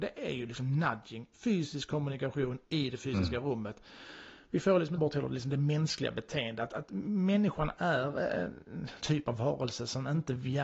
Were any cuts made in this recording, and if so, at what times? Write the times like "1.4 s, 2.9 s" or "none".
1.3 s, 5.0 s, 9.0 s